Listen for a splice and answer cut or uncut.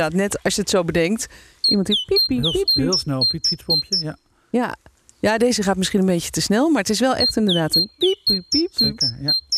uncut